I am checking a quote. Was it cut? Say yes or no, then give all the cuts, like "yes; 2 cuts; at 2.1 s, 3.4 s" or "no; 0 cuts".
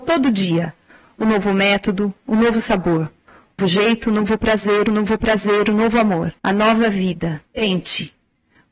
yes; 4 cuts; at 1.2 s, 3.6 s, 4.9 s, 6.4 s